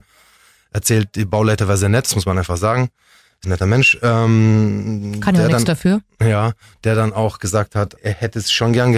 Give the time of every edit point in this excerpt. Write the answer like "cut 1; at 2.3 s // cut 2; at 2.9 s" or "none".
cut 1; at 3.4 s // cut 2; at 8.0 s